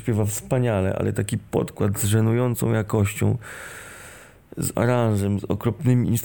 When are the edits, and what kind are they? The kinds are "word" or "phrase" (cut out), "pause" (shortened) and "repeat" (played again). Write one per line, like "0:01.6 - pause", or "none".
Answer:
0:04.7 - word